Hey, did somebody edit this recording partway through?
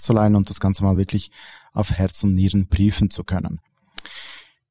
no; 0 cuts

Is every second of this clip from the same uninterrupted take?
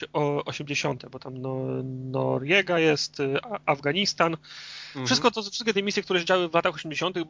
yes; 0 cuts

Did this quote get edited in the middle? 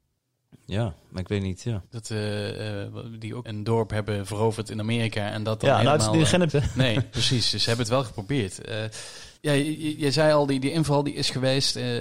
yes; 4 cuts; at 1.8 s, 3.4 s, 6.5 s, 9.4 s

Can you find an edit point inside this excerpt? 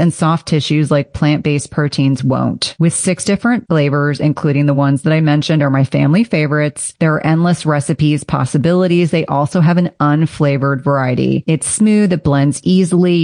no; 0 cuts

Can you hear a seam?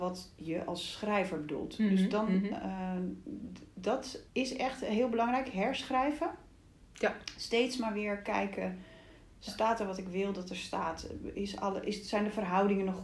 yes; 1 cut; at 4.3 s

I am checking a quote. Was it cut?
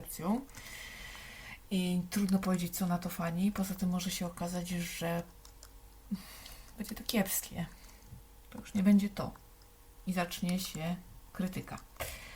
no; 0 cuts

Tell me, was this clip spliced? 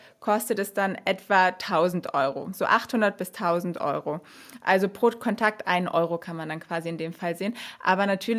no; 0 cuts

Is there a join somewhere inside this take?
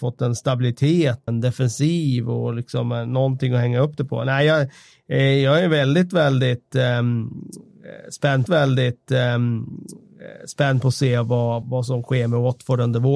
yes; 3 cuts; at 1.3 s, 8.5 s, 11.6 s

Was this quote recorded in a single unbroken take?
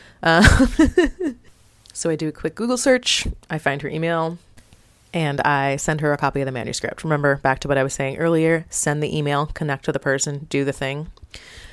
yes; 0 cuts

